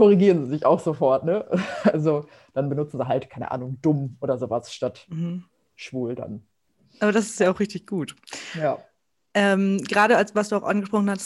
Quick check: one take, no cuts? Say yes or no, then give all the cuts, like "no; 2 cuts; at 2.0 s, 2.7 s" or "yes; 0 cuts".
yes; 0 cuts